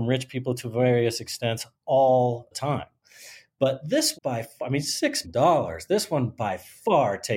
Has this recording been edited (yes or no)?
yes